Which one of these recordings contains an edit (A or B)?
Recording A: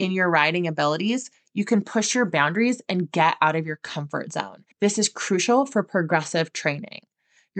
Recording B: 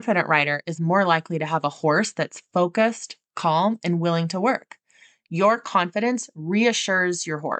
A